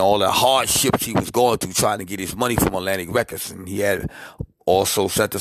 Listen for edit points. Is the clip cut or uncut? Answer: uncut